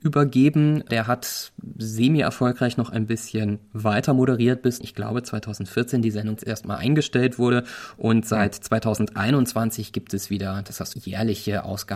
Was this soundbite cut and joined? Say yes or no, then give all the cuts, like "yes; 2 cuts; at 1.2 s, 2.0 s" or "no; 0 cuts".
yes; 3 cuts; at 4.8 s, 6.4 s, 10.9 s